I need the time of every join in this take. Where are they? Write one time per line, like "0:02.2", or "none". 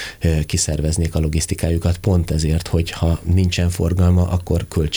none